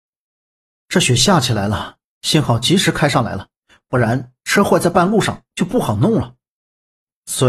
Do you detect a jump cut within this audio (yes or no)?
no